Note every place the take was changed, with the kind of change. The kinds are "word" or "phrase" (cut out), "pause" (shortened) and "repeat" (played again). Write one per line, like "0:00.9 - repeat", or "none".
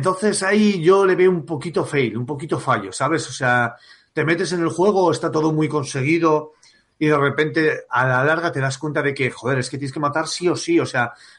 none

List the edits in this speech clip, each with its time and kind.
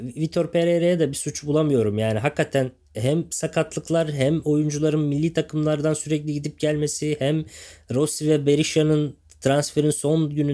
none

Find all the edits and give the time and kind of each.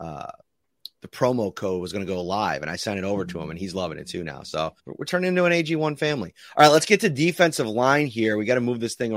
0:00.9 - pause
0:04.8 - pause

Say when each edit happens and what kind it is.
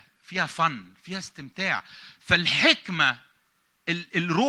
none

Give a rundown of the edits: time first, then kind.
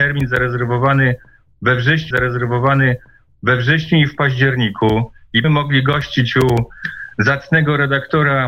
0:02.1 - repeat
0:05.4 - word

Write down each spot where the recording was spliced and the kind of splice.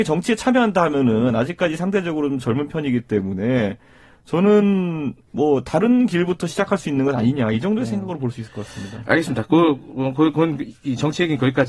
none

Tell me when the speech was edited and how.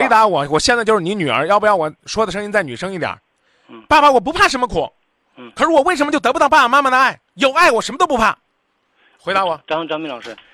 0:07.3 - pause
0:09.6 - pause

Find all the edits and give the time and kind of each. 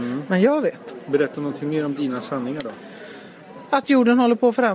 none

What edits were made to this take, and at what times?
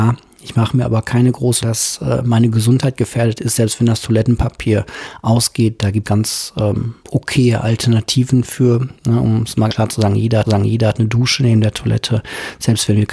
0:01.6 - word
0:06.0 - word
0:09.7 - word
0:10.4 - repeat

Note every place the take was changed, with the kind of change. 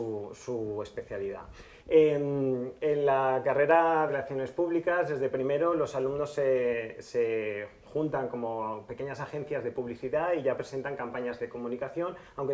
0:01.8 - pause
0:04.1 - phrase

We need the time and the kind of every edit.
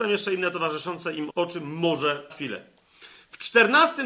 0:01.3 - word
0:02.3 - word

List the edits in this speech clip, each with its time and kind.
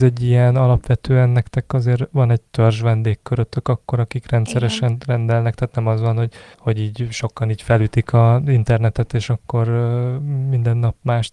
0:06.5 - pause

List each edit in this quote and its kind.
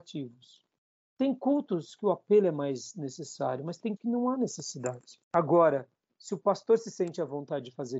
0:04.0 - word
0:05.2 - pause

